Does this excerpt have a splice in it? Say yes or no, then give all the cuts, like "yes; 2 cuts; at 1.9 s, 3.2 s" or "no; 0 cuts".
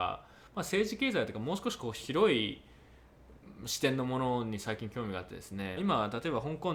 yes; 1 cut; at 5.8 s